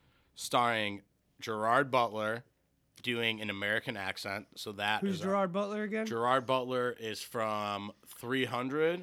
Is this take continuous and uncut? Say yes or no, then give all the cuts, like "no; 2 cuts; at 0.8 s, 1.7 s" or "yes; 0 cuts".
yes; 0 cuts